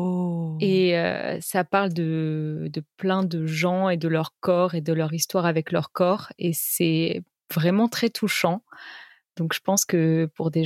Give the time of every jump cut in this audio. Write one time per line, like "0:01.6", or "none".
none